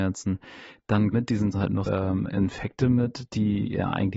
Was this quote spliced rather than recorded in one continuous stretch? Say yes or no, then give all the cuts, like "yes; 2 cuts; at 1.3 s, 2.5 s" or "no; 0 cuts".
yes; 3 cuts; at 1.1 s, 1.5 s, 1.9 s